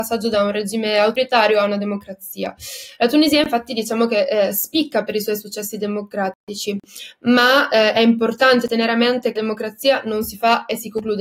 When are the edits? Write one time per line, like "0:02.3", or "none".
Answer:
0:09.3